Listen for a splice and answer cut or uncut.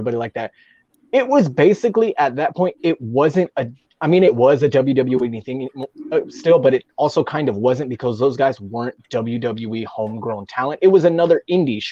uncut